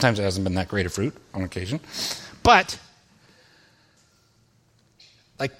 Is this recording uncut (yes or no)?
yes